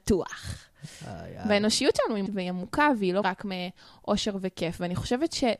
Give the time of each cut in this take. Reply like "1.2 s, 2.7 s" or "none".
2.3 s, 3.2 s